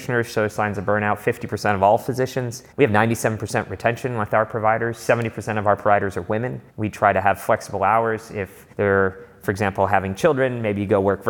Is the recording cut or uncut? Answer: cut